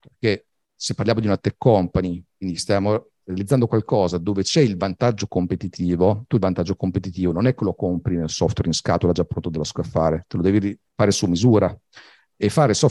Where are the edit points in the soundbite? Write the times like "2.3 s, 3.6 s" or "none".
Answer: 10.9 s